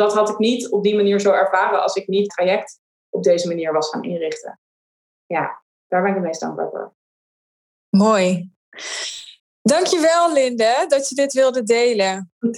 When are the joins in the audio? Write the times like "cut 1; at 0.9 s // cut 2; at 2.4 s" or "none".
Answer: cut 1; at 2.3 s

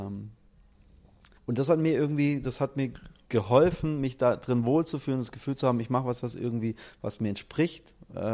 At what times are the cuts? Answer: cut 1; at 1.4 s

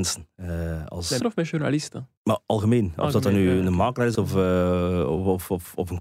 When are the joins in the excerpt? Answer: cut 1; at 1.2 s // cut 2; at 2.2 s // cut 3; at 4.1 s

